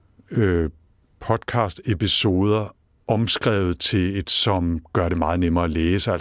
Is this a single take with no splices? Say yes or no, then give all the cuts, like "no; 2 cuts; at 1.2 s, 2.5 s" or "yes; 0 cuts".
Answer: no; 1 cut; at 4.2 s